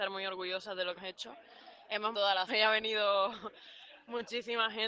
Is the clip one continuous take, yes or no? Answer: no